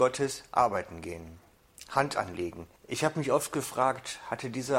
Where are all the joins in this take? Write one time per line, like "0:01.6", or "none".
0:02.8